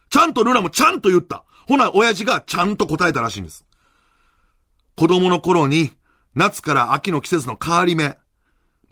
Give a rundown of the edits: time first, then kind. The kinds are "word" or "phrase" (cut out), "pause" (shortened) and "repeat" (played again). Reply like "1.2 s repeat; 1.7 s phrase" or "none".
none